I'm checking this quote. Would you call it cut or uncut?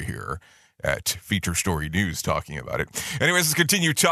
uncut